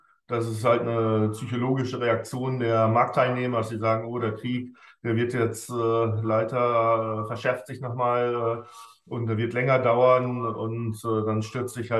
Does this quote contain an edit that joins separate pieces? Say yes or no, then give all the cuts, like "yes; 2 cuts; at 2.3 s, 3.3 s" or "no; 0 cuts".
no; 0 cuts